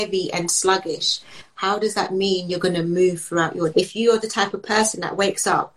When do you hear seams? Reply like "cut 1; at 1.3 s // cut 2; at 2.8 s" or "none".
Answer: cut 1; at 3.7 s